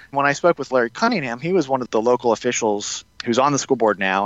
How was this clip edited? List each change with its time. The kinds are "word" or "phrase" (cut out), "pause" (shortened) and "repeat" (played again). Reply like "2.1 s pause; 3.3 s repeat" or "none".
1.9 s word; 3.1 s pause